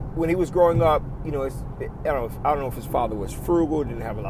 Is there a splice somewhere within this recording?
no; 0 cuts

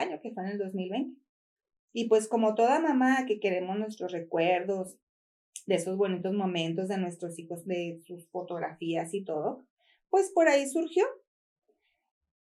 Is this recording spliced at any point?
no; 0 cuts

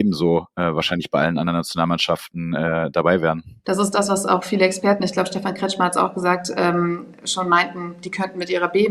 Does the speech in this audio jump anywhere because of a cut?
no; 0 cuts

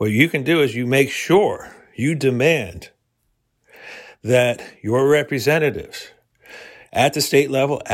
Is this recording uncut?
yes; 0 cuts

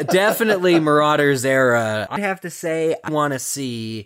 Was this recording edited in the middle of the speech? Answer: yes; 2 cuts; at 2.2 s, 3.1 s

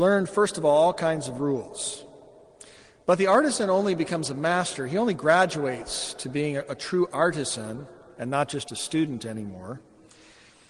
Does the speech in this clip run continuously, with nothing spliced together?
yes; 0 cuts

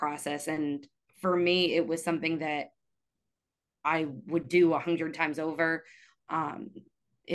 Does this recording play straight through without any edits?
yes; 0 cuts

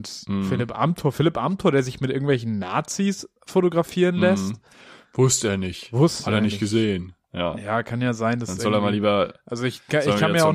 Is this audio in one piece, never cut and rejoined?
no; 1 cut; at 7.2 s

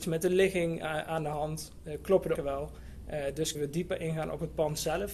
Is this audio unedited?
no; 2 cuts; at 2.3 s, 3.5 s

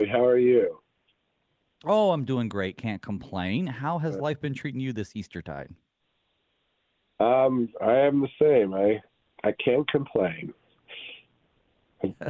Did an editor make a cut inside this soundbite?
no; 0 cuts

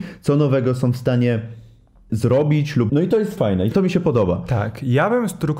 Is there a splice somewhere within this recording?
yes; 4 cuts; at 2.1 s, 2.9 s, 3.4 s, 3.7 s

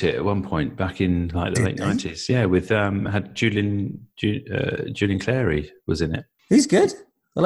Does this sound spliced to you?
no; 0 cuts

